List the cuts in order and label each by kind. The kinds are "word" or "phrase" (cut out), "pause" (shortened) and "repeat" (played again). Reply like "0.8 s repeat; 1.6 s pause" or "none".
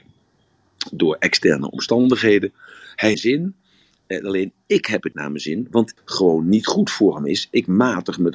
3.1 s phrase; 5.1 s word; 6.0 s phrase